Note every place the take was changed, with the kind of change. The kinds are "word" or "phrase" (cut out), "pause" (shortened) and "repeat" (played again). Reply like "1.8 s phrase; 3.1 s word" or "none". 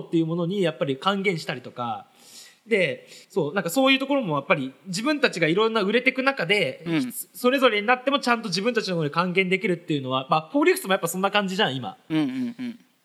3.2 s pause